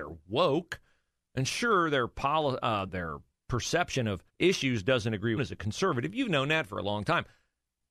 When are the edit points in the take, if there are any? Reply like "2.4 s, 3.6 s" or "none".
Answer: 2.9 s, 4.3 s, 5.4 s